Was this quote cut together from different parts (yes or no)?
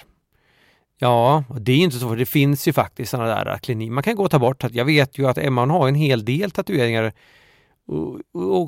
no